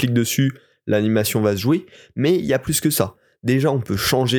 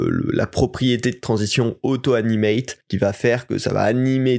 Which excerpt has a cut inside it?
second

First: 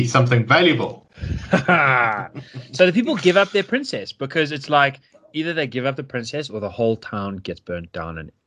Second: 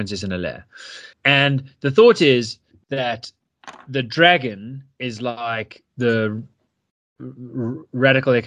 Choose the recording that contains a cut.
second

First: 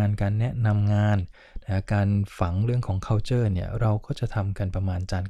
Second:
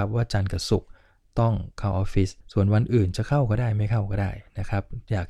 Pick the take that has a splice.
second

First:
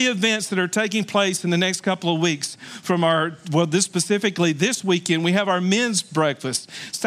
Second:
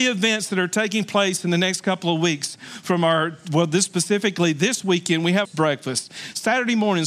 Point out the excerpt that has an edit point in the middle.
second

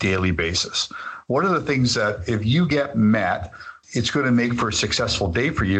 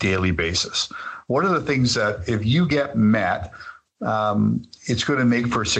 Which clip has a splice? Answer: first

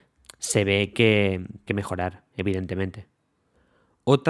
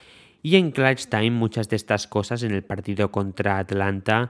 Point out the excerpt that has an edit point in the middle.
first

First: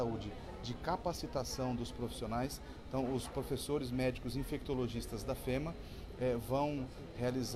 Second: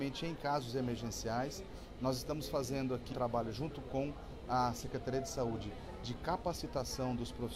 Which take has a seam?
second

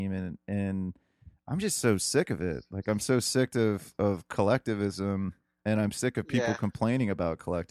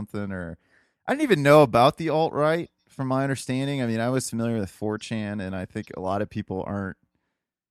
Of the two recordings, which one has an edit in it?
second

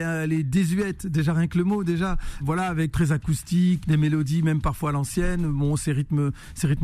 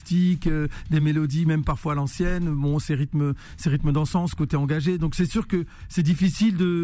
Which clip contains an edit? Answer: first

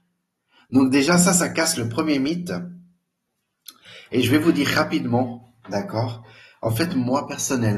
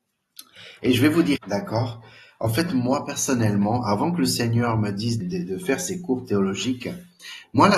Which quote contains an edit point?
second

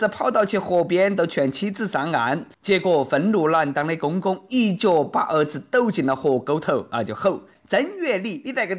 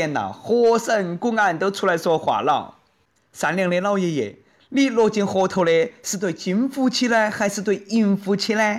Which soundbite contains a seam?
first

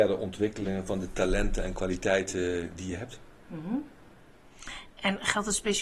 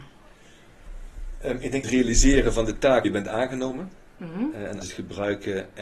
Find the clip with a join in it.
second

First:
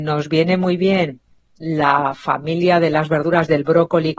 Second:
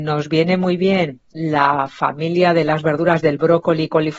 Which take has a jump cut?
second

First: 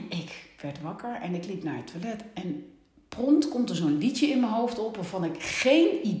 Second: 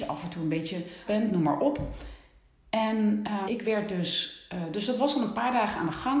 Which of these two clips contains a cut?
second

